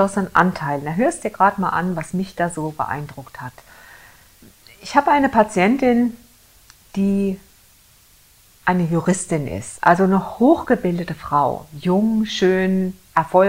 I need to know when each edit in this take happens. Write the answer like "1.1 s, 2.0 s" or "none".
none